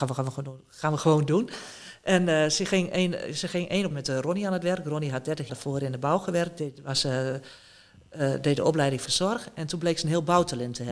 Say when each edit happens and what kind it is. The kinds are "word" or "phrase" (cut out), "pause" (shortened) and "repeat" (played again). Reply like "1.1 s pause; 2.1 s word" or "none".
3.9 s word; 5.5 s word; 9.1 s word